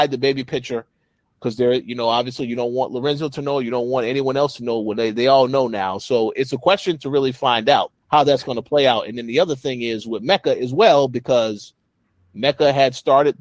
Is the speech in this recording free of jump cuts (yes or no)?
no